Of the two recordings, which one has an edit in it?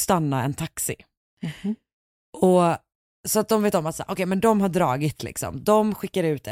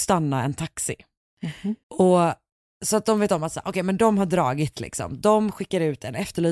second; 1 cut; at 1.8 s

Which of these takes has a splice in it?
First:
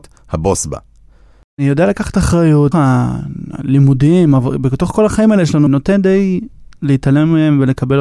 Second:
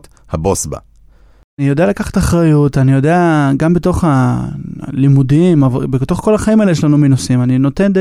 first; 2 cuts; at 2.7 s, 5.7 s

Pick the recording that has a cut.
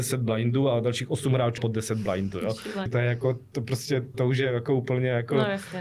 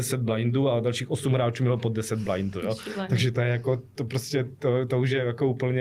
first; 3 cuts; at 1.6 s, 2.9 s, 4.1 s

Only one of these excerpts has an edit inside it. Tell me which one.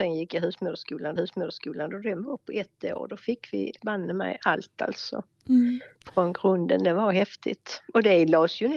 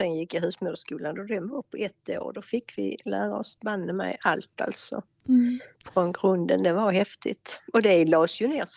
first; 2 cuts; at 1.2 s, 3.8 s

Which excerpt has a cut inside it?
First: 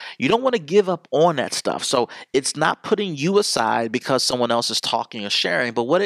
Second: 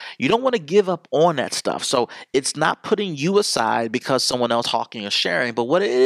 second; 1 cut; at 4.6 s

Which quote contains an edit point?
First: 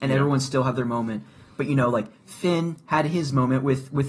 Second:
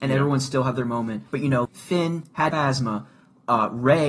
second; 3 cuts; at 1.3 s, 1.6 s, 2.5 s

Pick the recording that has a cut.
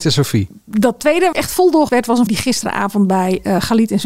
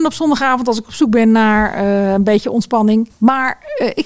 first; 3 cuts; at 1.3 s, 1.9 s, 2.3 s

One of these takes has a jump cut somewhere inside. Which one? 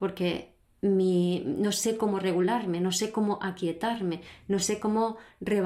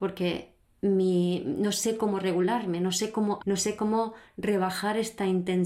second; 1 cut; at 3.4 s

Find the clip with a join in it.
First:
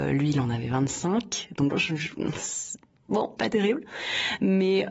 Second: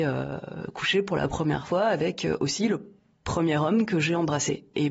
first; 2 cuts; at 1.7 s, 3.4 s

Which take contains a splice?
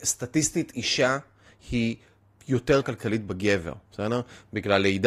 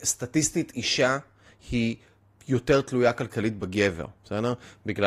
first; 1 cut; at 2.8 s

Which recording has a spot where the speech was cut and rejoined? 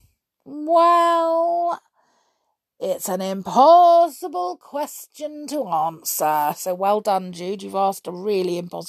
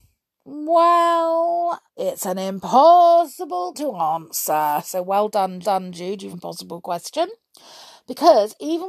second; 4 cuts; at 1.9 s, 3.7 s, 5.6 s, 6.3 s

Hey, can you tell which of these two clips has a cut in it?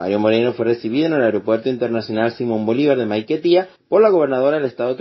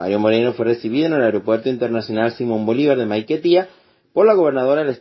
first; 1 cut; at 3.8 s

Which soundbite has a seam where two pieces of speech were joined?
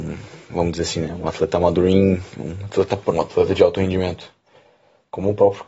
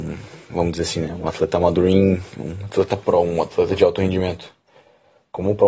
first; 1 cut; at 3.1 s

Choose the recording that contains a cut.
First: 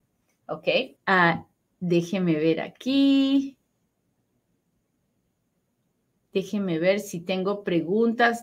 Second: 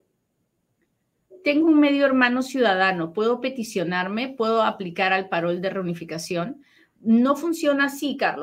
first; 1 cut; at 1.0 s

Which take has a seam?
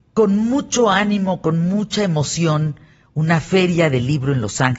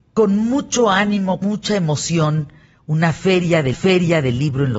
second; 2 cuts; at 1.4 s, 3.7 s

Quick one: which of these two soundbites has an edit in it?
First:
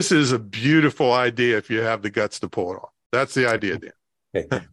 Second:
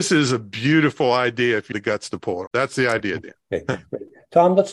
second; 3 cuts; at 1.7 s, 2.5 s, 3.4 s

